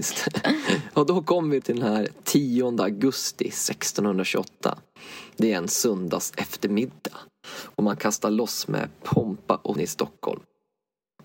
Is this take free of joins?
no; 2 cuts; at 1.6 s, 9.8 s

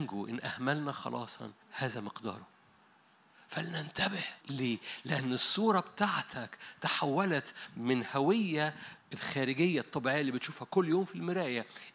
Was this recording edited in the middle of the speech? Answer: yes; 3 cuts; at 1.6 s, 4.4 s, 9.0 s

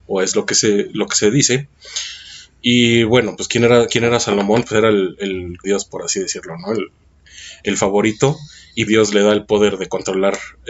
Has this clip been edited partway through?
yes; 2 cuts; at 5.6 s, 8.9 s

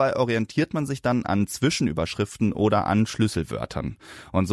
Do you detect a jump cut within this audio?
no; 0 cuts

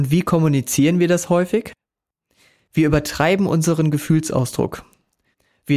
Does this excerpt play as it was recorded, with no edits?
yes; 0 cuts

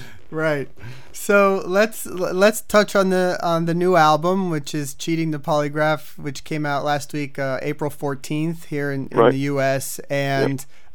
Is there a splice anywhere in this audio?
no; 0 cuts

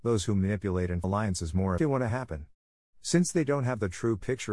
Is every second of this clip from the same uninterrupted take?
no; 2 cuts; at 1.0 s, 1.8 s

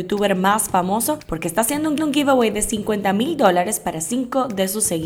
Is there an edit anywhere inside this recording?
yes; 1 cut; at 2.0 s

